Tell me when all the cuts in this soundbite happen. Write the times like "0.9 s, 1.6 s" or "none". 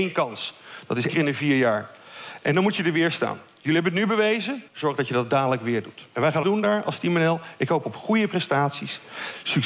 1.1 s, 4.7 s, 6.4 s